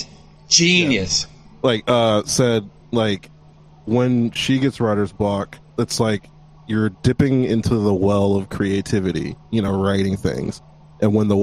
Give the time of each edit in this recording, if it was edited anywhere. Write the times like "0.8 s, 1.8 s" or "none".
none